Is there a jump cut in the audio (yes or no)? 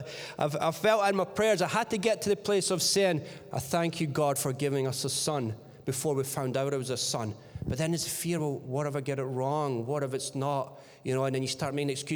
no